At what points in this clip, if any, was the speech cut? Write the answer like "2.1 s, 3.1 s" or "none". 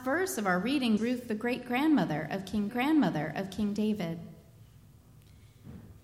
1.0 s, 2.7 s